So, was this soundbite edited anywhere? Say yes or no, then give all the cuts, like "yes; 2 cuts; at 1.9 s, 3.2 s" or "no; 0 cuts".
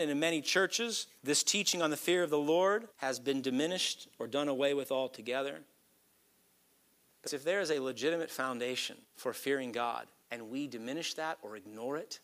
yes; 5 cuts; at 1.2 s, 2.9 s, 7.3 s, 9.0 s, 10.2 s